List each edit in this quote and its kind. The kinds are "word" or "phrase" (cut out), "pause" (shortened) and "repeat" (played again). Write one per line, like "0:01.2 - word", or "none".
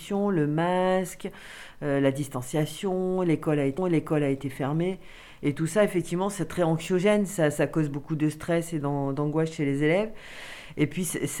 0:03.8 - repeat